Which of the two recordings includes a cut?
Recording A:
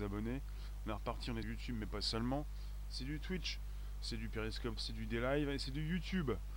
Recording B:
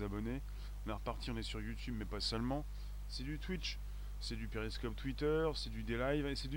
A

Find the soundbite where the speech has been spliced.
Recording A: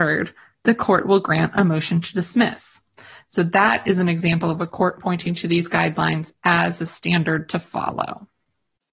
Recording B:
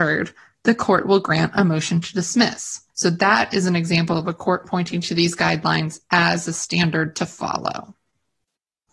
B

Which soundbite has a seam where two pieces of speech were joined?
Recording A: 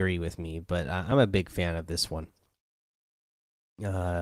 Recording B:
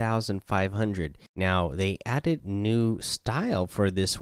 B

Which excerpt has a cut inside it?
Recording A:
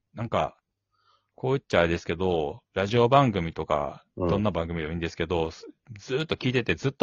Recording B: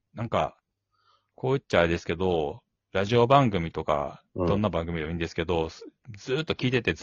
A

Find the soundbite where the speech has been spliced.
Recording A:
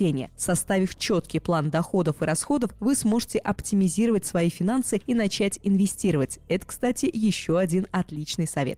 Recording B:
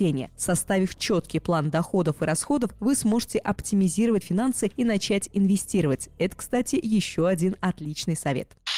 B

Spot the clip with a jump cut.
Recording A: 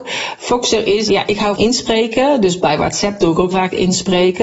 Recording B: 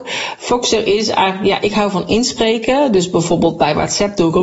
A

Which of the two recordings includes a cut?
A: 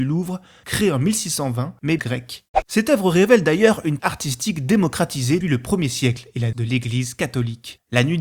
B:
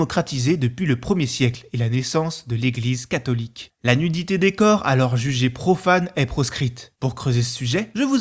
A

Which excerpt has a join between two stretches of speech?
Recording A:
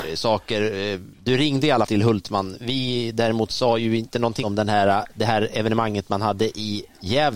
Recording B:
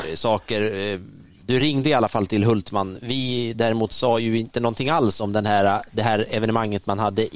A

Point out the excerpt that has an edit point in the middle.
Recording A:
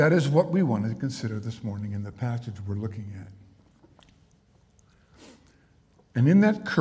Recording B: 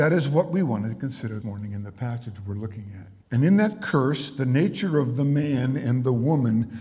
B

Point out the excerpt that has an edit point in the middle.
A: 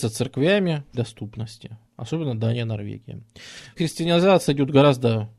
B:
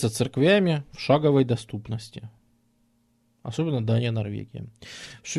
A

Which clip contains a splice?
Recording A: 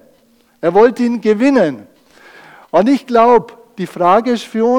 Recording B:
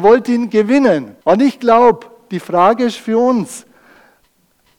B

